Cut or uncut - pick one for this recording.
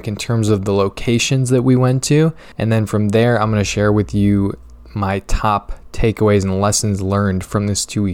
cut